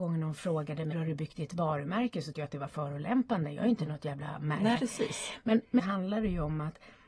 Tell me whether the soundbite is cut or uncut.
cut